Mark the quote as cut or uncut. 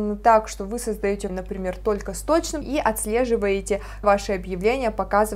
cut